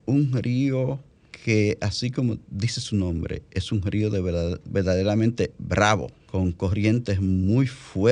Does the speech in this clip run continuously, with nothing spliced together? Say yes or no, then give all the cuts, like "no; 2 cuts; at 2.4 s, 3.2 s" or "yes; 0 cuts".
no; 1 cut; at 6.2 s